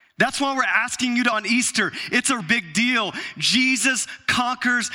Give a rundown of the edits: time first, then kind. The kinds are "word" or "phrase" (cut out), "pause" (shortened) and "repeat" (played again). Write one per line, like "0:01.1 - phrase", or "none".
0:01.3 - word
0:02.4 - word